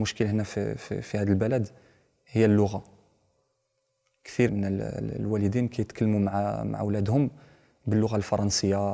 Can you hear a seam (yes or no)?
yes